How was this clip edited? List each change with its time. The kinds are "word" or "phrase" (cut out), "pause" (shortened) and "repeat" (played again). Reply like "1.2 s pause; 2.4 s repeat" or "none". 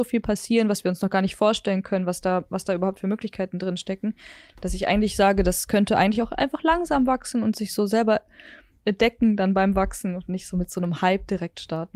none